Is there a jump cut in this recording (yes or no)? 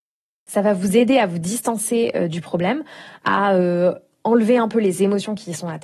no